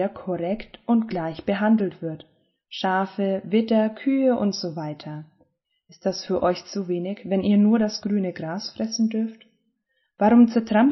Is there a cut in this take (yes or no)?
no